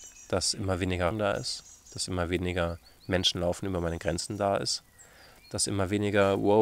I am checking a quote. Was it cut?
yes; 1 cut; at 1.1 s

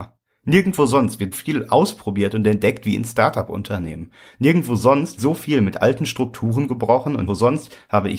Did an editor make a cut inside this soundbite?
yes; 3 cuts; at 1.3 s, 5.2 s, 7.3 s

